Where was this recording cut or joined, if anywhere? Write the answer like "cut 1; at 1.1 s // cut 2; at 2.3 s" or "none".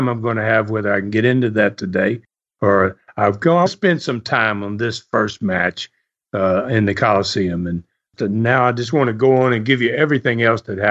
cut 1; at 3.7 s